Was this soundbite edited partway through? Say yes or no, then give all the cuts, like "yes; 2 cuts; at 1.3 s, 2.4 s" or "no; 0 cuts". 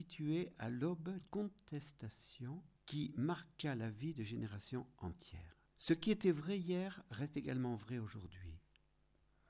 yes; 3 cuts; at 1.2 s, 2.7 s, 5.7 s